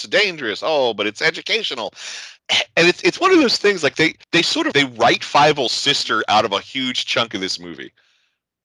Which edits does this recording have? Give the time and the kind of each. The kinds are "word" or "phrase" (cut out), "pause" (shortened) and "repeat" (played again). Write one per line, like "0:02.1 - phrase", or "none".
0:02.4 - pause
0:04.2 - pause
0:04.7 - word

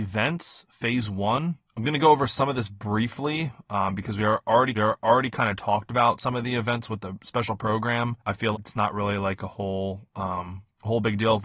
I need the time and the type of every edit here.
0:04.7 - repeat
0:08.5 - word

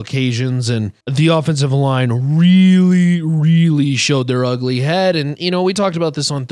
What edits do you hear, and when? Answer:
0:01.0 - pause

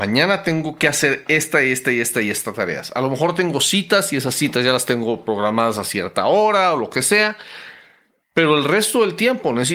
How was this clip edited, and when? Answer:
none

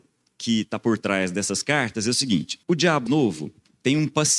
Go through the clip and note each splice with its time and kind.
0:02.6 - pause
0:03.1 - word

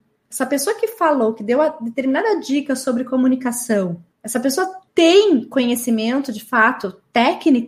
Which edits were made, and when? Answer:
0:04.1 - pause
0:04.9 - pause

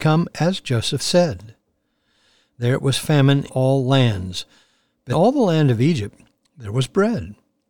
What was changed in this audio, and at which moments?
0:01.0 - word
0:03.5 - word
0:05.1 - word

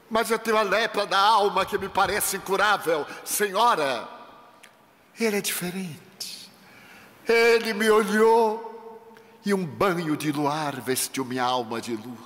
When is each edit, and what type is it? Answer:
none

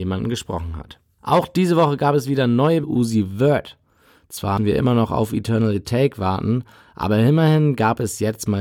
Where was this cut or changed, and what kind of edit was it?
0:01.1 - pause
0:02.8 - phrase
0:04.6 - word

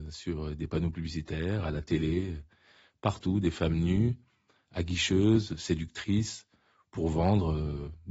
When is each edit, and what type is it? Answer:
none

